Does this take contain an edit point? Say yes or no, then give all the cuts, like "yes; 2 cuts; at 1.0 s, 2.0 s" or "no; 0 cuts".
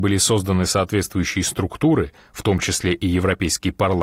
no; 0 cuts